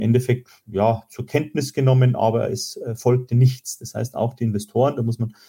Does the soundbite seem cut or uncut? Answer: uncut